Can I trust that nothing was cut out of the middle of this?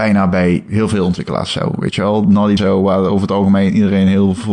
no; 1 cut; at 2.6 s

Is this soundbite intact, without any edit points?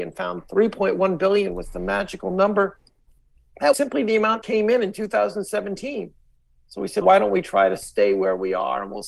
no; 3 cuts; at 3.7 s, 4.4 s, 7.0 s

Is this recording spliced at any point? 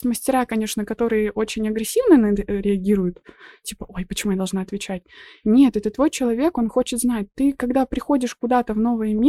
no; 0 cuts

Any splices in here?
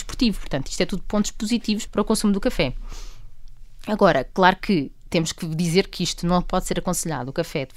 yes; 1 cut; at 1.9 s

